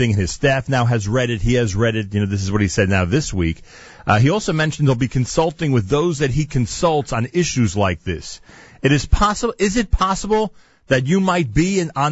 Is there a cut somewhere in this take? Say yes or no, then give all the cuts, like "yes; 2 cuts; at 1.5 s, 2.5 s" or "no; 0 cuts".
no; 0 cuts